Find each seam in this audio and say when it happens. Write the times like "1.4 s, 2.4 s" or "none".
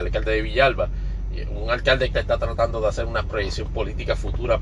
2.1 s

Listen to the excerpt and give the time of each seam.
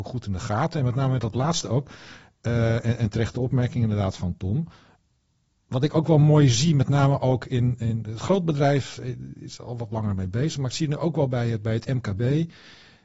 none

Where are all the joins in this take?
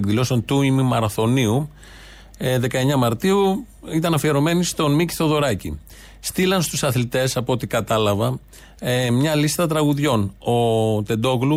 none

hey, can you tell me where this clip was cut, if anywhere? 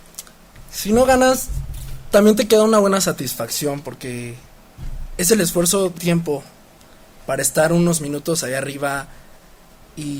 6.0 s

